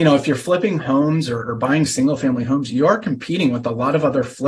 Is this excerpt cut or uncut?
uncut